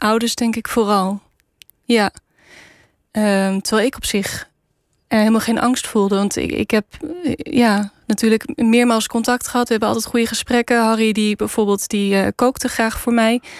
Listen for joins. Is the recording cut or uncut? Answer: uncut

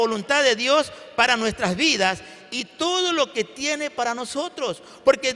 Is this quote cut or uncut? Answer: uncut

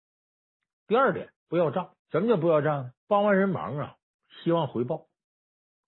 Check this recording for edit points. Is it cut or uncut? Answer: cut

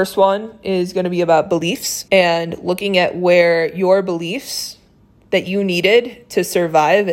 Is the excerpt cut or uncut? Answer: cut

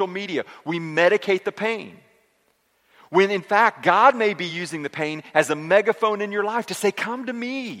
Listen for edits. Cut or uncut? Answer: uncut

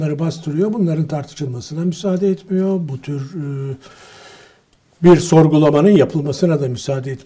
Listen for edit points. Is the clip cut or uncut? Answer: uncut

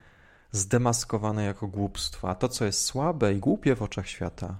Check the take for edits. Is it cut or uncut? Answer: uncut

